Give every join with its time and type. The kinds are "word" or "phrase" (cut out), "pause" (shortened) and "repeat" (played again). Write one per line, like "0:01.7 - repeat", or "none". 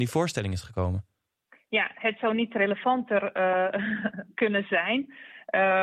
none